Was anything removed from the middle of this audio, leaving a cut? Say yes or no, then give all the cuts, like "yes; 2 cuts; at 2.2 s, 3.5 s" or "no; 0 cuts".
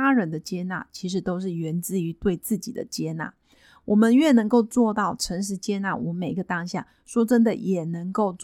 no; 0 cuts